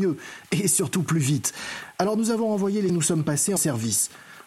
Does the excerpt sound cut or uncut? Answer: cut